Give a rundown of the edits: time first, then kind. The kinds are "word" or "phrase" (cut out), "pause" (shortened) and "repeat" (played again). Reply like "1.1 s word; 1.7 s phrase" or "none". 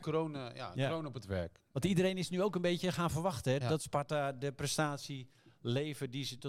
3.6 s word